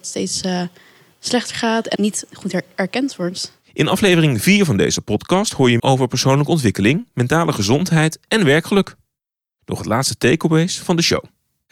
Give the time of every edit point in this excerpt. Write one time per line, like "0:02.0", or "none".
0:02.0
0:05.8